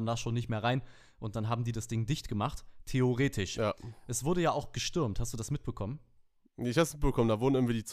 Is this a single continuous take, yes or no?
yes